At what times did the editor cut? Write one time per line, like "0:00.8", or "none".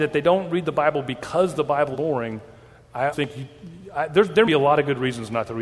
0:01.9
0:03.1
0:04.4

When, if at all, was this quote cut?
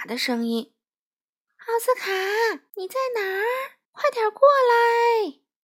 0:02.7
0:03.8

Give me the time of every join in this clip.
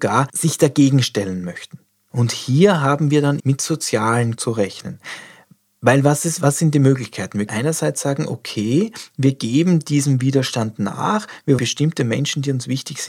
0:03.4
0:04.4
0:07.5
0:11.6

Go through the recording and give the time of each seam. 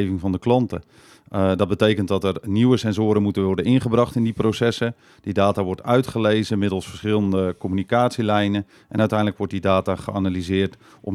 none

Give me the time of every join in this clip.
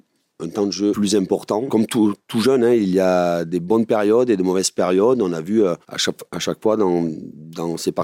0:05.8

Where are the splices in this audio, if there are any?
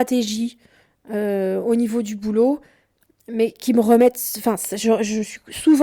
none

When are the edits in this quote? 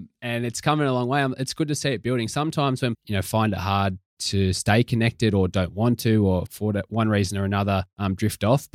0:02.9
0:06.5

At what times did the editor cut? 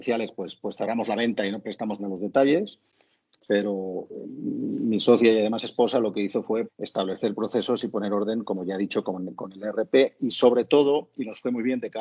0:02.0
0:04.2
0:06.7

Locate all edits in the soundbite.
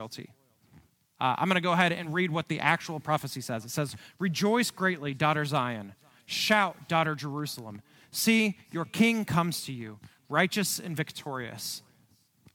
none

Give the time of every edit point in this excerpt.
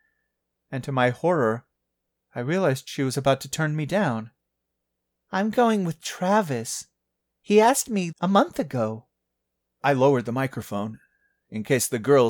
0:08.1

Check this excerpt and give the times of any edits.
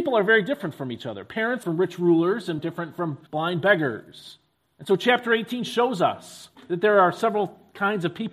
0:01.6
0:02.6
0:03.3
0:04.6
0:06.5

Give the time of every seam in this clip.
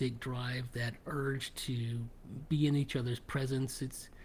none

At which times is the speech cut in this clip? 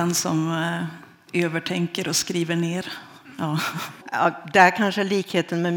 none

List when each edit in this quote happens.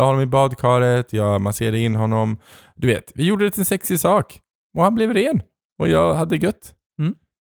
none

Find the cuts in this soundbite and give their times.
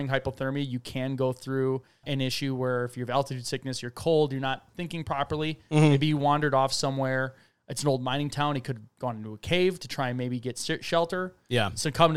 0:02.0

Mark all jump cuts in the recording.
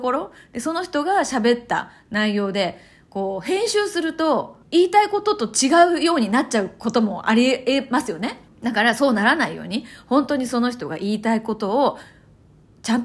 0:04.6
0:08.5

